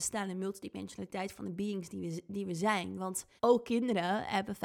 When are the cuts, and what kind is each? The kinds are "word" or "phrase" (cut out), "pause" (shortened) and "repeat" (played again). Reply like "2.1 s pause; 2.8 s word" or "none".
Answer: 3.4 s pause